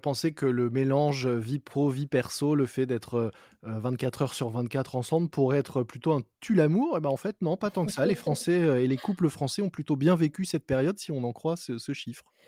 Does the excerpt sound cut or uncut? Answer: uncut